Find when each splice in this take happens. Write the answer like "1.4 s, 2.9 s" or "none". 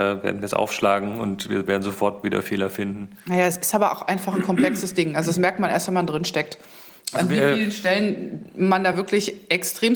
none